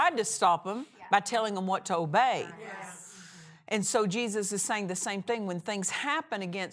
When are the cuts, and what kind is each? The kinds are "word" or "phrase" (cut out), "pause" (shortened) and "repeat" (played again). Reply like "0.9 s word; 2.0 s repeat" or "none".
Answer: none